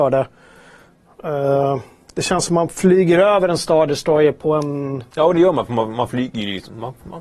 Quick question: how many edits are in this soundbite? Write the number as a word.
one